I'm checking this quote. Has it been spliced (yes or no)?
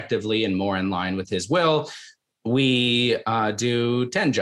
no